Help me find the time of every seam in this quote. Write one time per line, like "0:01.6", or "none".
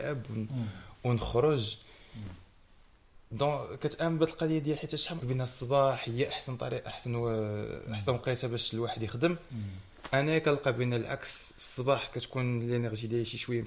0:05.2